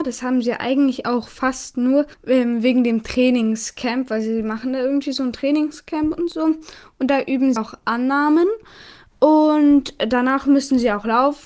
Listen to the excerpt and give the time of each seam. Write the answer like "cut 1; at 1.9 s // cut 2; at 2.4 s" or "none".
cut 1; at 2.1 s // cut 2; at 7.6 s

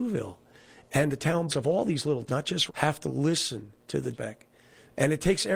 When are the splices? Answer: cut 1; at 1.5 s // cut 2; at 2.3 s // cut 3; at 2.7 s // cut 4; at 3.8 s // cut 5; at 4.1 s

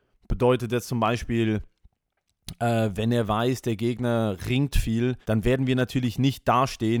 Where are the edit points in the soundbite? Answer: cut 1; at 5.2 s

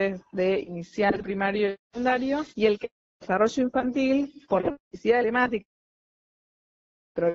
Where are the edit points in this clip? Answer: cut 1; at 2.5 s // cut 2; at 4.4 s // cut 3; at 4.8 s // cut 4; at 5.2 s

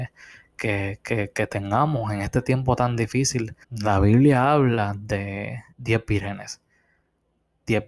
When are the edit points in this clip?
cut 1; at 3.6 s // cut 2; at 5.7 s

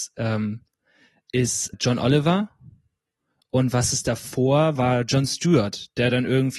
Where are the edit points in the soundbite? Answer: cut 1; at 1.7 s // cut 2; at 4.8 s

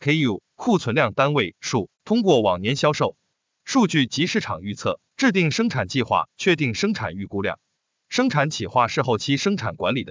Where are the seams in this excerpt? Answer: cut 1; at 1.9 s // cut 2; at 5.1 s

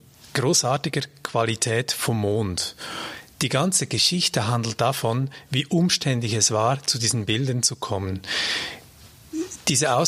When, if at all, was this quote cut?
none

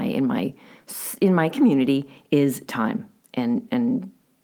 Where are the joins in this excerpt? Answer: none

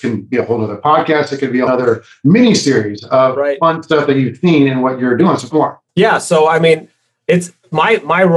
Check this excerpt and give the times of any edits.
cut 1; at 1.7 s // cut 2; at 5.5 s // cut 3; at 5.9 s

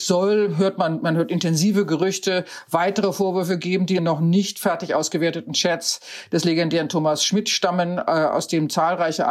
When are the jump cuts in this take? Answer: cut 1; at 4.0 s

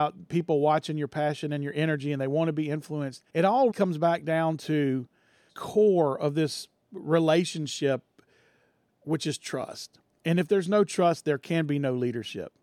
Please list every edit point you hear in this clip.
cut 1; at 3.3 s // cut 2; at 3.7 s // cut 3; at 5.5 s // cut 4; at 6.8 s

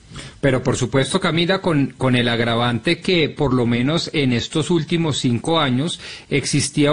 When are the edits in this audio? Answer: none

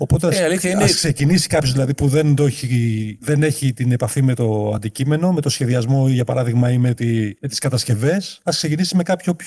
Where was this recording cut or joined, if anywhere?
none

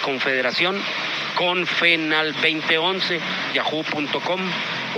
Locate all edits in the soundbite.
cut 1; at 2.3 s // cut 2; at 3.5 s

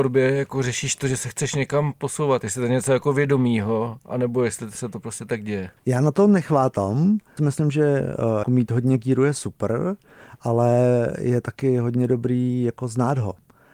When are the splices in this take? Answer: cut 1; at 5.8 s // cut 2; at 7.4 s // cut 3; at 8.4 s

